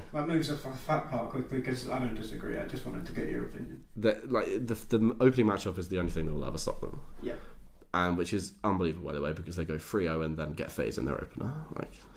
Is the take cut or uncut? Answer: uncut